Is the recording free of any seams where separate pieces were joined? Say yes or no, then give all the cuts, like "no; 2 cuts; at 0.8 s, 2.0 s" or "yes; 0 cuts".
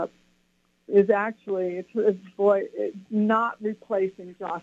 no; 1 cut; at 3.1 s